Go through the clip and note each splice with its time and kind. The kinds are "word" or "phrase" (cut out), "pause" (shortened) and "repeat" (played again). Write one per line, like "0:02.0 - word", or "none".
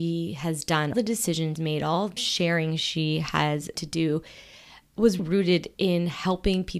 0:00.9 - word
0:01.6 - word
0:02.2 - word
0:03.8 - word
0:05.2 - word

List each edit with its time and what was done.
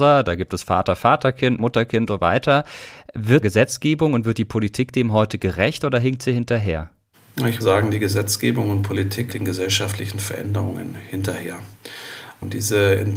0:01.6 - word
0:02.1 - word
0:03.4 - phrase
0:07.6 - word
0:09.3 - word

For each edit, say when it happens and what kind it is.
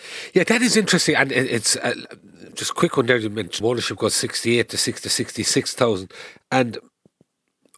0:02.5 - pause
0:03.6 - word
0:05.0 - repeat

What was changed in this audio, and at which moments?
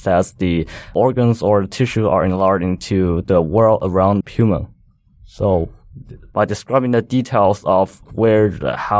0:03.2 - word
0:04.2 - word
0:08.1 - word

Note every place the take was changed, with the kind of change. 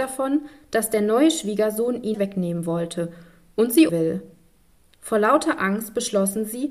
0:02.1 - phrase
0:03.9 - word

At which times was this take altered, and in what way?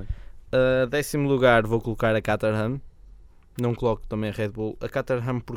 none

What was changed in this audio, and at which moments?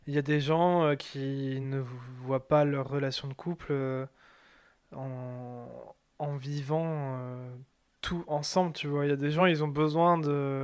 none

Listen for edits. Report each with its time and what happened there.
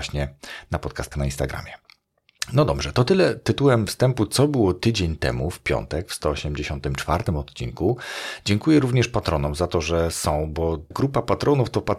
0:01.1 - word
0:10.9 - word

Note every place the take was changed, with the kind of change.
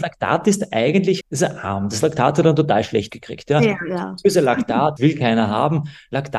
0:01.2 - phrase
0:03.1 - word
0:05.0 - word

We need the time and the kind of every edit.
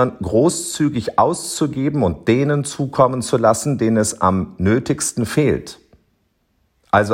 none

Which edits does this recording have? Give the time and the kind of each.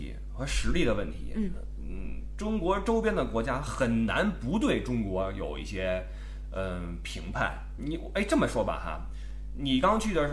0:07.8 - word

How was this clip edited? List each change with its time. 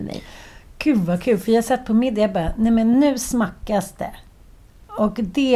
none

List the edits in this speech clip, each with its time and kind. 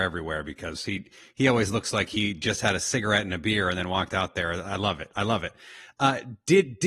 none

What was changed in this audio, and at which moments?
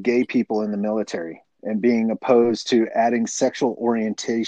none

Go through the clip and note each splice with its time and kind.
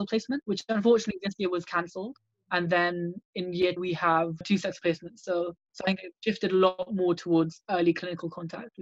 0:03.2 - pause
0:03.8 - word
0:06.2 - pause

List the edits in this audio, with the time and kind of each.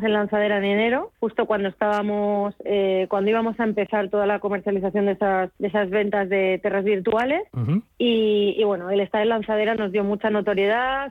0:01.1 - pause
0:05.6 - pause

